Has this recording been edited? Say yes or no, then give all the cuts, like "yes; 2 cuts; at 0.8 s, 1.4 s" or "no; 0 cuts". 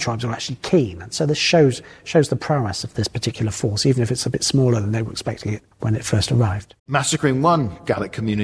yes; 2 cuts; at 5.7 s, 6.8 s